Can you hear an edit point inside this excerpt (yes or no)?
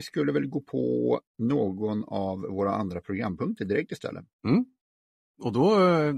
yes